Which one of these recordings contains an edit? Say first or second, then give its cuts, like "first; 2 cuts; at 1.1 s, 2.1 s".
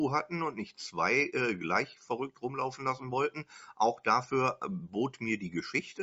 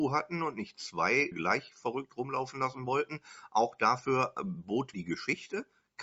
second; 2 cuts; at 1.3 s, 4.9 s